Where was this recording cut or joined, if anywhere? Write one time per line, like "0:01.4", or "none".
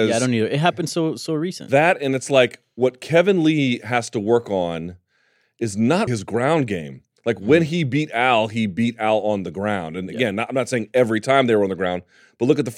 0:06.1

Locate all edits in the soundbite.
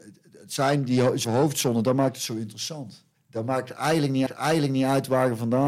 0:01.2
0:03.2
0:04.3

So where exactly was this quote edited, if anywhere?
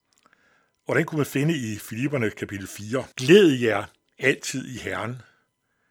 0:03.1

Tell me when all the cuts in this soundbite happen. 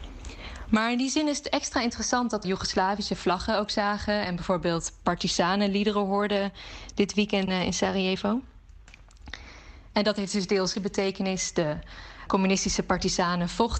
0:02.4
0:07.5
0:10.7
0:12.3

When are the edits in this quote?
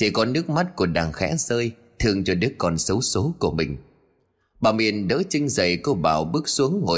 none

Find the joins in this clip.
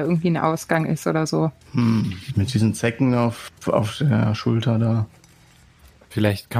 0:01.6
0:03.6

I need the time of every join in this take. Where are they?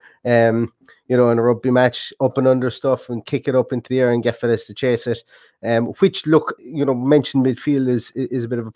0:06.6

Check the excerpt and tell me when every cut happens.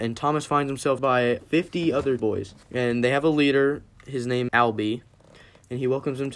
0:01.0
0:01.4
0:02.2
0:02.6
0:03.9
0:04.5

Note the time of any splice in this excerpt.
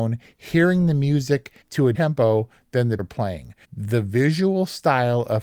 0:01.6
0:01.9
0:03.0
0:03.6

